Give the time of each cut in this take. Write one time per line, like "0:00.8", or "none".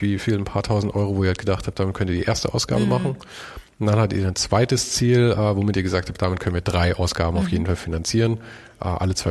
none